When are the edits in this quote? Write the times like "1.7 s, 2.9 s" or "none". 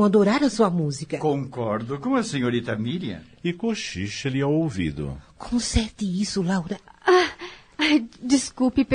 none